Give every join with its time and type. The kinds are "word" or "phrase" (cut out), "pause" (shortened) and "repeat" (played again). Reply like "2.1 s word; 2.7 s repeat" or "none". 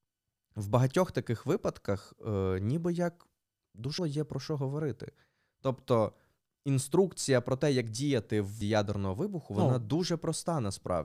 4.0 s word; 8.6 s word